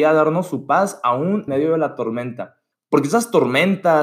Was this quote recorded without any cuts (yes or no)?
no